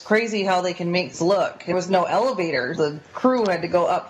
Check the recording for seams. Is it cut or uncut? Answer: cut